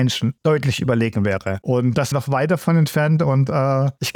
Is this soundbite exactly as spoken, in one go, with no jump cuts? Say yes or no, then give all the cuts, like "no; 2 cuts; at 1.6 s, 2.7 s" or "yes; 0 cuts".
no; 1 cut; at 2.1 s